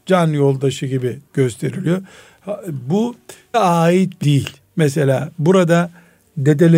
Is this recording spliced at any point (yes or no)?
yes